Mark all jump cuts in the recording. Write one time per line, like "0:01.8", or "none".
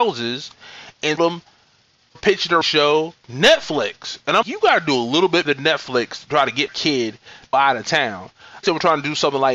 0:01.2
0:02.1
0:02.6
0:03.2
0:04.4
0:05.4
0:06.7
0:07.5
0:08.6